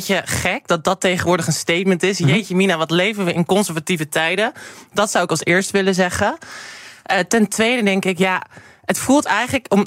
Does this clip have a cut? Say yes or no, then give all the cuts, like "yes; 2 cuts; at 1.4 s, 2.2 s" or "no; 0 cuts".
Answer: no; 0 cuts